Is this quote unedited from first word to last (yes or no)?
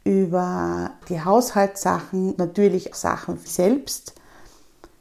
no